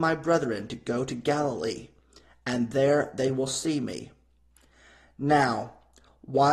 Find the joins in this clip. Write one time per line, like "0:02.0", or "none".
none